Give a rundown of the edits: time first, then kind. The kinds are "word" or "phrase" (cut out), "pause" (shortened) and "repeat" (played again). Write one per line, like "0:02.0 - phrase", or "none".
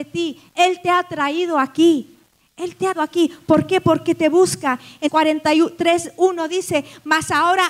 0:02.9 - word
0:05.0 - word